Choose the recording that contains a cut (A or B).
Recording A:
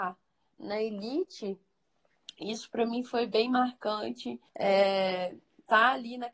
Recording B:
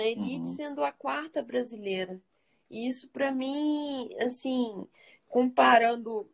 A